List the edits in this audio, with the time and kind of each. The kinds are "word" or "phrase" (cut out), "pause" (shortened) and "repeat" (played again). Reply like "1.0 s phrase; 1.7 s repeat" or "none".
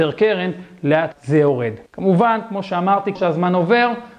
1.1 s word; 1.9 s pause; 3.2 s word